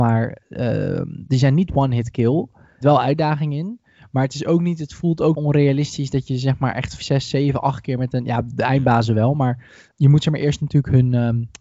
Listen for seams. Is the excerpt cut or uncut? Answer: cut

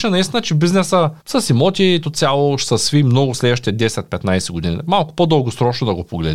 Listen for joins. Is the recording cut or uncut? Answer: cut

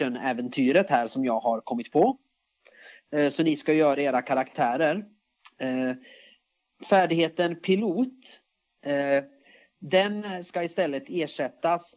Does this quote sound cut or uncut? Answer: uncut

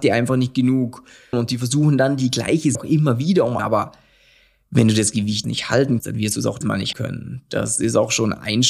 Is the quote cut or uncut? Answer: cut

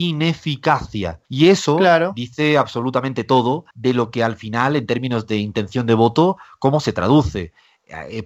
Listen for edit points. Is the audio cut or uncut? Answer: cut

